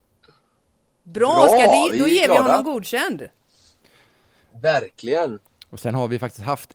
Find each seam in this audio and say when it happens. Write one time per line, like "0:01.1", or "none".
none